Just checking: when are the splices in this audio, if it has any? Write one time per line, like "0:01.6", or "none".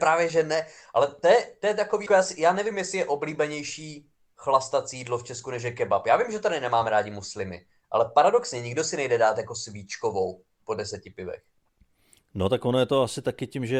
0:02.1